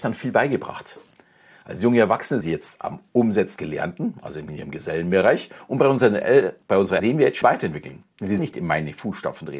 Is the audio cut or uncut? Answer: cut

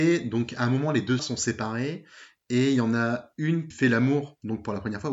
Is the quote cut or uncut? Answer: cut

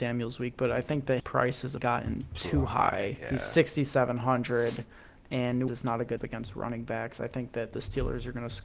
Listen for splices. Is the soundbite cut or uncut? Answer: cut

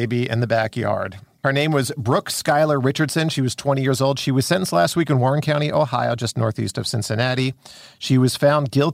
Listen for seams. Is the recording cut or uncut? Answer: uncut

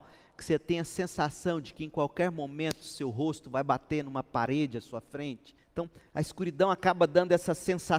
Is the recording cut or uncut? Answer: cut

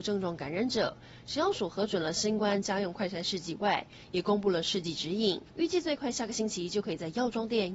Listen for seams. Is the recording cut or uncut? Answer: cut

